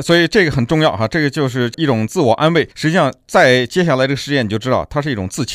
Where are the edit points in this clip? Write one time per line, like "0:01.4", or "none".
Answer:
0:02.7